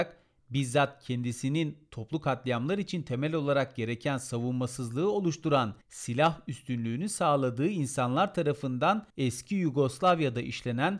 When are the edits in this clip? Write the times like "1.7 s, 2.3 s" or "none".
5.8 s, 9.1 s

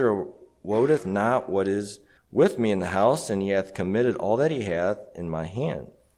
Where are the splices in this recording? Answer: 2.2 s

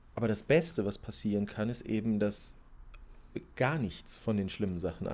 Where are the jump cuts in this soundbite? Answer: none

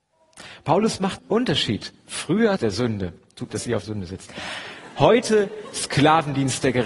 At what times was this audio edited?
1.2 s, 2.6 s, 3.5 s, 3.8 s

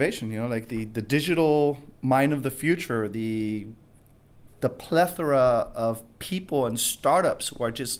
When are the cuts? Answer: none

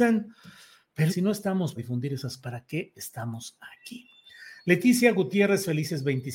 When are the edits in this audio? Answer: 1.1 s, 1.8 s, 2.4 s

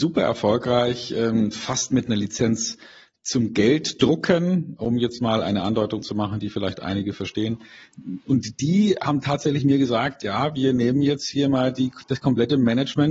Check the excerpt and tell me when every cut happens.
none

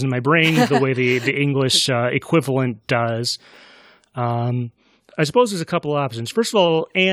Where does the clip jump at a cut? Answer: none

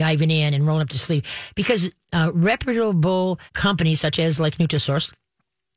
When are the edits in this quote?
3.5 s

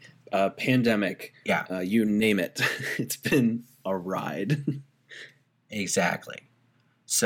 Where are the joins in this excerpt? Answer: none

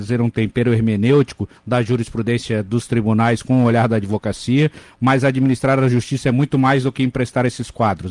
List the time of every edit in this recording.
1.6 s

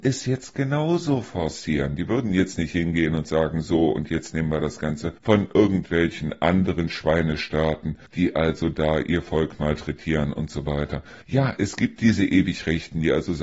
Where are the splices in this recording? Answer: 5.2 s, 8.1 s, 11.2 s

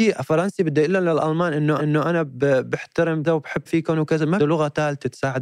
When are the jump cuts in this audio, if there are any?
1.8 s, 3.2 s, 3.7 s, 4.4 s

